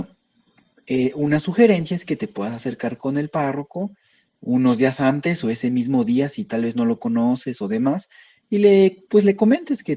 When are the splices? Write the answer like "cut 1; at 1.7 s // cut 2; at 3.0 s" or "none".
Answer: none

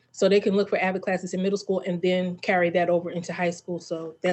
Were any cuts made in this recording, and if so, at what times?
none

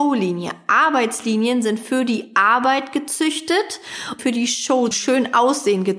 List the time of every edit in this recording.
cut 1; at 4.2 s // cut 2; at 4.9 s

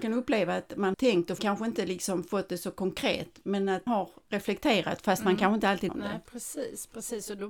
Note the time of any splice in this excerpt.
cut 1; at 0.9 s // cut 2; at 1.4 s // cut 3; at 3.9 s // cut 4; at 5.9 s

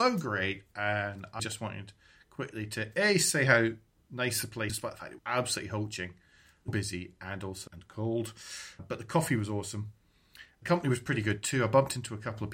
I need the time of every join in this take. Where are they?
cut 1; at 1.4 s // cut 2; at 4.7 s // cut 3; at 5.2 s // cut 4; at 6.7 s // cut 5; at 7.7 s // cut 6; at 8.8 s

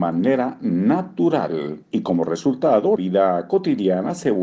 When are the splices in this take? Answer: cut 1; at 1.8 s // cut 2; at 3.0 s

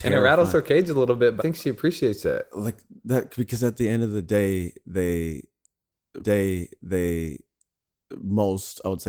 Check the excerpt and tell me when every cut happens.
cut 1; at 1.4 s // cut 2; at 2.5 s // cut 3; at 6.2 s

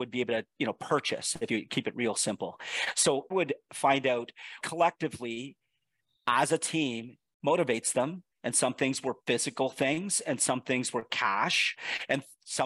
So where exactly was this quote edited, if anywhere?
cut 1; at 1.5 s // cut 2; at 3.3 s // cut 3; at 4.6 s // cut 4; at 8.3 s // cut 5; at 9.2 s

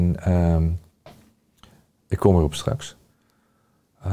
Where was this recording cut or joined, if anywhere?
none

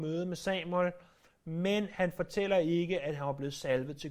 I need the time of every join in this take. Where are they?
none

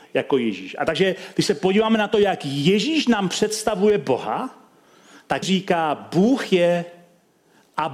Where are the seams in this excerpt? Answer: cut 1; at 5.4 s

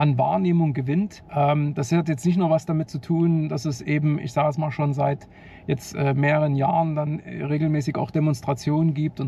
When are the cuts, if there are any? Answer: cut 1; at 1.2 s

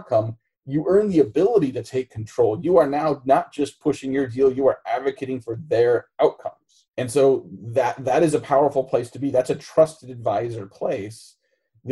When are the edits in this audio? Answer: cut 1; at 6.9 s

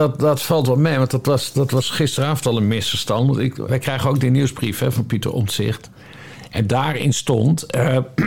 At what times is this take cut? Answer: cut 1; at 3.7 s

